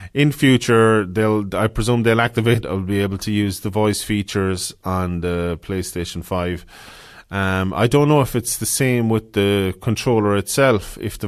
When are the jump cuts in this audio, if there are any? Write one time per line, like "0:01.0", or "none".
0:02.6